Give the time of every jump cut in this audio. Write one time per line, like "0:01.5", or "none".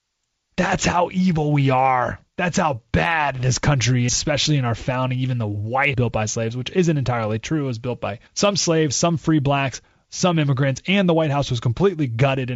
0:02.3
0:04.1
0:05.9
0:08.3